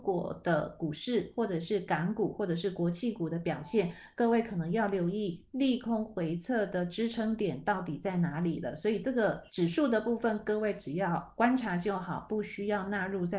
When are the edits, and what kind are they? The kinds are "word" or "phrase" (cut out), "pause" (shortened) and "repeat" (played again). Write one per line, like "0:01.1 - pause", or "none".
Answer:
0:09.5 - pause